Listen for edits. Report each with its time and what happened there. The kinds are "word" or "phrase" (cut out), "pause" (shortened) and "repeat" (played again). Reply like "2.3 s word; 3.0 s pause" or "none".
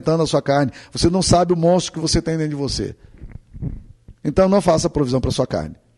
4.2 s pause